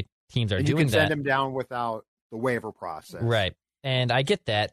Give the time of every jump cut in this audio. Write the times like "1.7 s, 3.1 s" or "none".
none